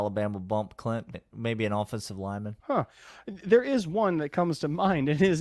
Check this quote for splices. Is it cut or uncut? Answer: cut